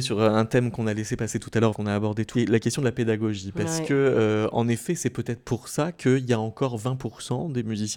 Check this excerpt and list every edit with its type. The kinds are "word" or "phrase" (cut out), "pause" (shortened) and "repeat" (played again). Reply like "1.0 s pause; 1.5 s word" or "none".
1.7 s word; 2.3 s word